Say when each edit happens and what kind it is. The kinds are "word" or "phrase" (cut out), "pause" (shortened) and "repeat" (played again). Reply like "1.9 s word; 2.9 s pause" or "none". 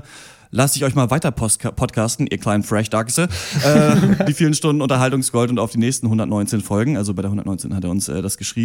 4.3 s phrase